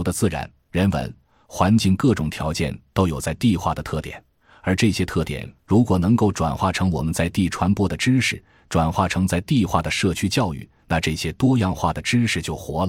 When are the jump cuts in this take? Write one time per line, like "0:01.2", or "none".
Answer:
none